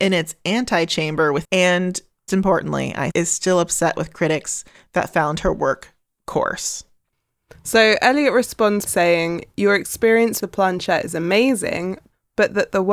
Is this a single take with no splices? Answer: no; 5 cuts; at 1.4 s, 2.3 s, 3.1 s, 8.9 s, 10.4 s

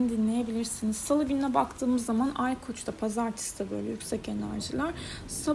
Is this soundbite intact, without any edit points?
yes; 0 cuts

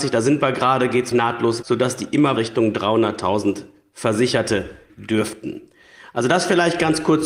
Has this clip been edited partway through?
yes; 4 cuts; at 1.1 s, 1.6 s, 2.4 s, 4.9 s

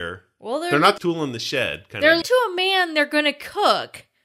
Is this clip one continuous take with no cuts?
no; 2 cuts; at 1.0 s, 2.2 s

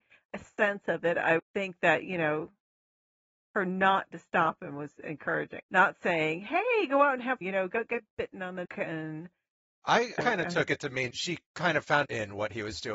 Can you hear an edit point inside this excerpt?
yes; 8 cuts; at 1.4 s, 4.1 s, 5.6 s, 7.4 s, 8.6 s, 10.2 s, 11.1 s, 12.0 s

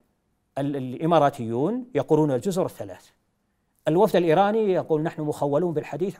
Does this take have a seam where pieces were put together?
no; 0 cuts

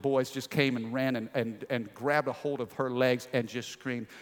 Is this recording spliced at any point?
no; 0 cuts

